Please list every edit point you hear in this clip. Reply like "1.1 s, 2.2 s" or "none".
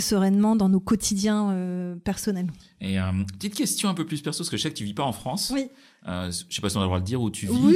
none